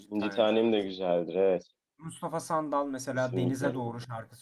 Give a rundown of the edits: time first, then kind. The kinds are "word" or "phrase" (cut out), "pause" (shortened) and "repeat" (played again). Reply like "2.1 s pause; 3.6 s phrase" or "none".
none